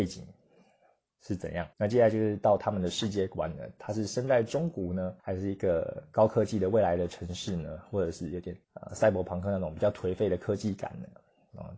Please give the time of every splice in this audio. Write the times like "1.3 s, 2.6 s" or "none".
1.7 s, 5.2 s, 8.6 s